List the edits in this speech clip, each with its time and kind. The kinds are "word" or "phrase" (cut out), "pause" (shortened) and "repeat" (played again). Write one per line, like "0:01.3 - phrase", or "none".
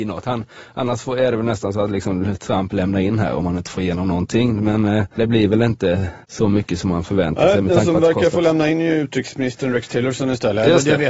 0:06.2 - pause

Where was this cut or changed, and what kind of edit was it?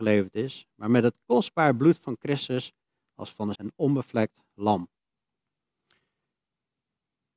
0:03.5 - word

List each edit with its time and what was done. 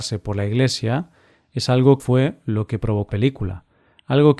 0:02.0 - word
0:03.1 - word

